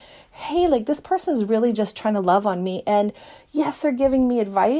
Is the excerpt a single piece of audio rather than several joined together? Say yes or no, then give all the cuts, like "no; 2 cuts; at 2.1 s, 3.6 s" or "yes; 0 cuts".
yes; 0 cuts